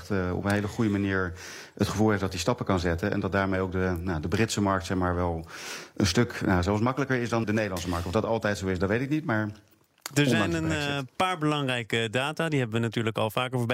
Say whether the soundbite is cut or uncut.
cut